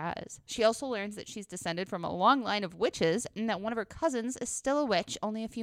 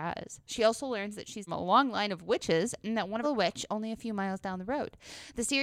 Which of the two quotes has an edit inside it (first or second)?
second